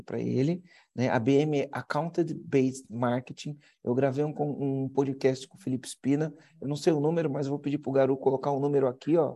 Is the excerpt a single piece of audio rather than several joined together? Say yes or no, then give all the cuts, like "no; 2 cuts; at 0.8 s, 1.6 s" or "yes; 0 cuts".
yes; 0 cuts